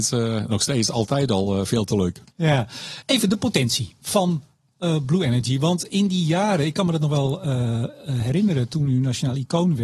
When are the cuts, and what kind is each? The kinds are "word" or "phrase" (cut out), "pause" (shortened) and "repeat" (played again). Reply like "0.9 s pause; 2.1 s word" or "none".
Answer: 2.3 s pause